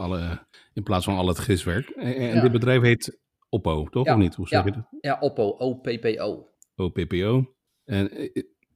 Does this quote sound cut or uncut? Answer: uncut